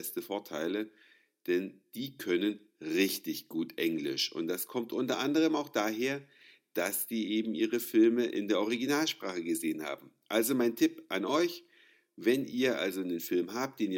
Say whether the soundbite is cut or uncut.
uncut